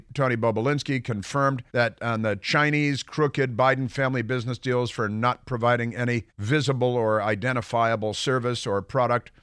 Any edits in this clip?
yes; 2 cuts; at 1.7 s, 6.3 s

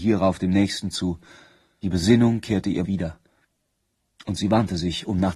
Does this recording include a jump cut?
yes; 3 cuts; at 0.9 s, 1.8 s, 2.8 s

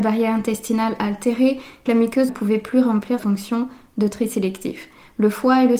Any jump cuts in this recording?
yes; 3 cuts; at 1.9 s, 2.3 s, 3.2 s

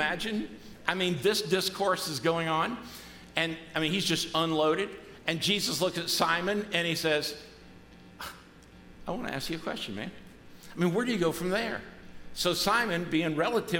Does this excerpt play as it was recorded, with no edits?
yes; 0 cuts

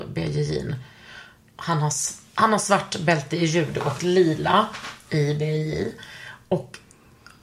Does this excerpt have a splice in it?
no; 0 cuts

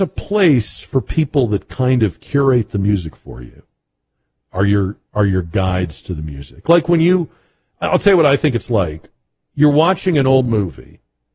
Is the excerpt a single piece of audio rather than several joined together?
yes; 0 cuts

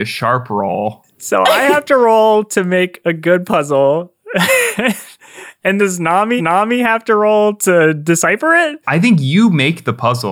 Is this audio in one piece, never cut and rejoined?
no; 3 cuts; at 5.8 s, 6.4 s, 8.8 s

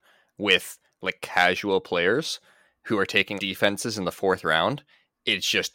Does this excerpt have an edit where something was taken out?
yes; 1 cut; at 3.4 s

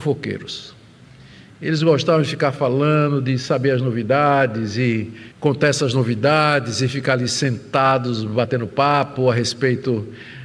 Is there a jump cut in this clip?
yes; 1 cut; at 5.3 s

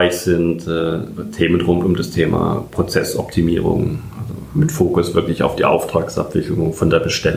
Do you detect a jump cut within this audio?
no; 0 cuts

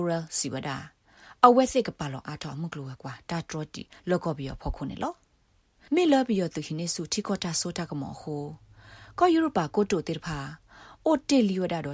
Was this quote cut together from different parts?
no; 0 cuts

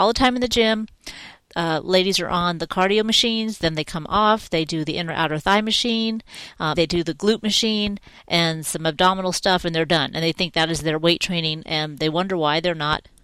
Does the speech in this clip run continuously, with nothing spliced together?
no; 1 cut; at 6.7 s

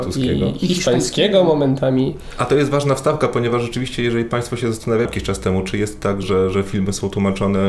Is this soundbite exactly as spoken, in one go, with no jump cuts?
no; 2 cuts; at 5.0 s, 6.2 s

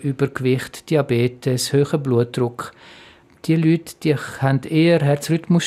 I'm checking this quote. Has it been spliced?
no; 0 cuts

